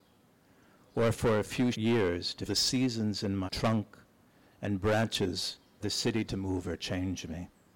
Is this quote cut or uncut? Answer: cut